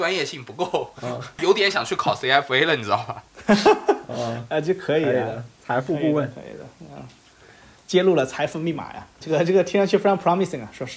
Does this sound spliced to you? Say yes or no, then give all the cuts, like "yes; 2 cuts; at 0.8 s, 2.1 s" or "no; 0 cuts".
no; 0 cuts